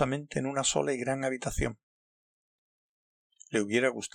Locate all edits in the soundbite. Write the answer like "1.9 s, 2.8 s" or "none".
none